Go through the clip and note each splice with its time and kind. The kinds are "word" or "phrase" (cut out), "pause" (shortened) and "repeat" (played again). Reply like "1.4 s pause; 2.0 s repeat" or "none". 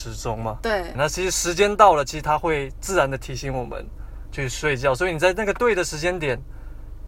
0.9 s word